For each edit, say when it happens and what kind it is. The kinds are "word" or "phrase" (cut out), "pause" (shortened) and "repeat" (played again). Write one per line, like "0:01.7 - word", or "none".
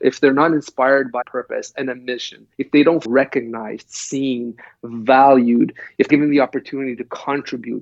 0:01.2 - phrase
0:02.5 - pause
0:03.0 - word
0:06.1 - word